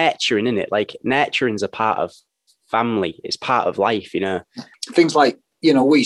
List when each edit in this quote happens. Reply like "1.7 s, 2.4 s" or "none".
none